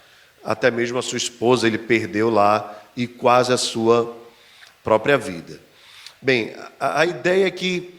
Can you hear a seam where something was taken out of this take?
no; 0 cuts

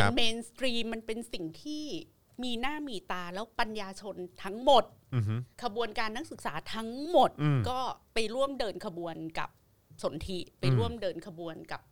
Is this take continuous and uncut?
no; 2 cuts; at 5.5 s, 8.1 s

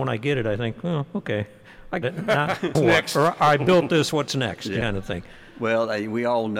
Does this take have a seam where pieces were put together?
yes; 3 cuts; at 2.0 s, 2.7 s, 4.8 s

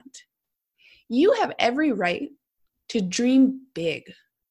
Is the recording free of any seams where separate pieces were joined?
yes; 0 cuts

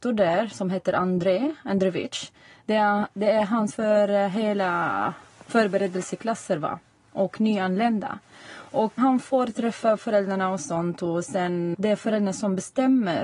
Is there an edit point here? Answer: yes; 3 cuts; at 3.7 s, 9.0 s, 11.7 s

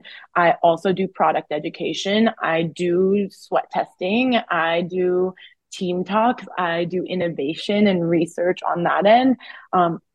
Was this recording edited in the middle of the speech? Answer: no; 0 cuts

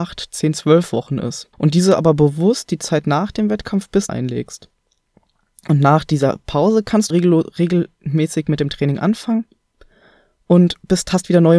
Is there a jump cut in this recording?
yes; 3 cuts; at 1.5 s, 4.1 s, 7.1 s

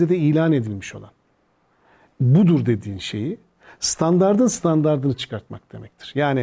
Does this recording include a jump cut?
no; 0 cuts

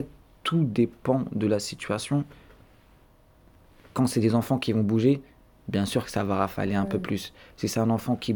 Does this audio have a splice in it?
no; 0 cuts

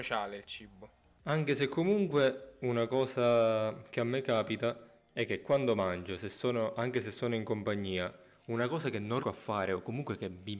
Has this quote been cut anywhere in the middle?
yes; 1 cut; at 9.2 s

